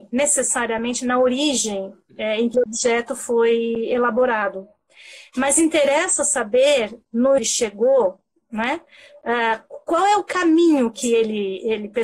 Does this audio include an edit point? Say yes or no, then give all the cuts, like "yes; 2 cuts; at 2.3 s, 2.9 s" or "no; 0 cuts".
yes; 2 cuts; at 2.5 s, 7.4 s